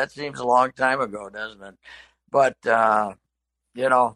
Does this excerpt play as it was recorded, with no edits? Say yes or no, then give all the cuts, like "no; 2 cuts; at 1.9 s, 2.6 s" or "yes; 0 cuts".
yes; 0 cuts